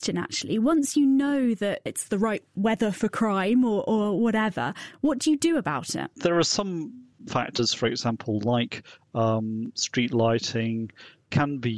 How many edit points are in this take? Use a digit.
1